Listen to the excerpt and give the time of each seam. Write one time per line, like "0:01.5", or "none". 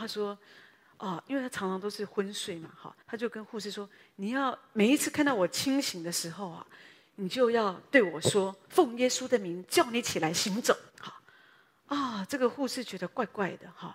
0:03.0
0:10.9